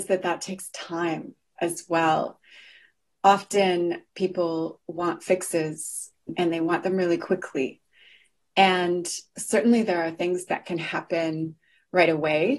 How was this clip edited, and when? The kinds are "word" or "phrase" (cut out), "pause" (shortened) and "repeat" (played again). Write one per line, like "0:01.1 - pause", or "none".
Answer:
none